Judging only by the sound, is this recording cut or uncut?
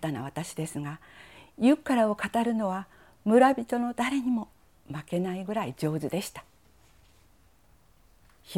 uncut